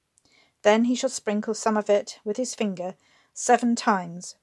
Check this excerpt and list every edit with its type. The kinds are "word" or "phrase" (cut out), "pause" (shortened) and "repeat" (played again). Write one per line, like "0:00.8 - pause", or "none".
none